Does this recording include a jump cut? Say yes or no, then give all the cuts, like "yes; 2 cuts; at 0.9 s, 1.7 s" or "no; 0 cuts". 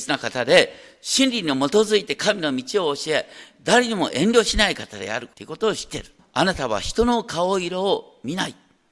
yes; 2 cuts; at 5.3 s, 6.2 s